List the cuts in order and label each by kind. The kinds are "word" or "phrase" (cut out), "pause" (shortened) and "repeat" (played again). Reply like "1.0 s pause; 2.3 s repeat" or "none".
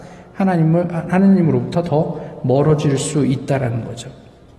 none